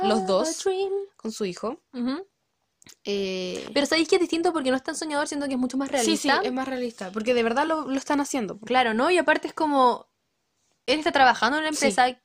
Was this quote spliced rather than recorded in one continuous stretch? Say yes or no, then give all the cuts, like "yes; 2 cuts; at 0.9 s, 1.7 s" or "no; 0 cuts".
no; 0 cuts